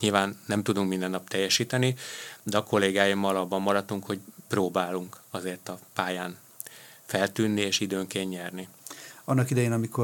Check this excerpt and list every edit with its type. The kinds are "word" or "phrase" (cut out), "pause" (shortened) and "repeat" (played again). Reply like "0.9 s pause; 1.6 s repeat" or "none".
none

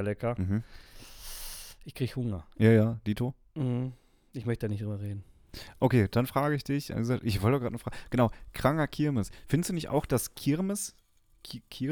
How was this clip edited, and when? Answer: none

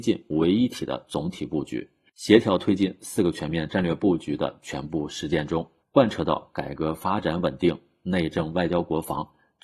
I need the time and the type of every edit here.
5.8 s pause

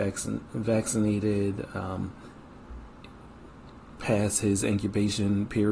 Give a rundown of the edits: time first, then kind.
none

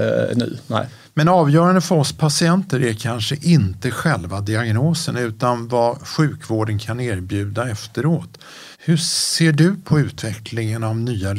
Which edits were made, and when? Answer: 8.7 s pause

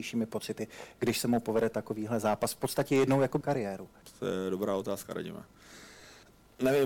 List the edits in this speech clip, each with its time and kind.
3.4 s word

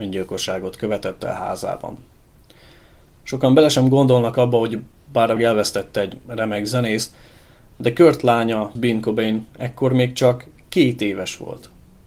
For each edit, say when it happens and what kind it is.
5.4 s word; 8.8 s word

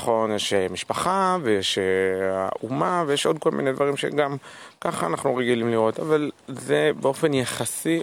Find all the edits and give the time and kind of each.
none

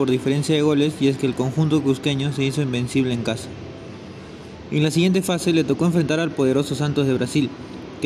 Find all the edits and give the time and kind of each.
none

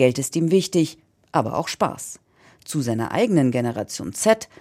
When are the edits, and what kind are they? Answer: none

